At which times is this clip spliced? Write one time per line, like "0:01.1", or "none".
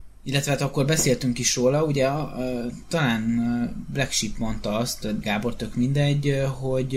0:05.2